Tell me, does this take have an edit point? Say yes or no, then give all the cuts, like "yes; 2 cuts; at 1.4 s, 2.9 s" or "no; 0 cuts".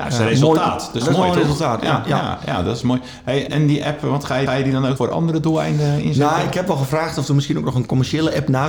yes; 4 cuts; at 1.0 s, 3.5 s, 4.5 s, 5.0 s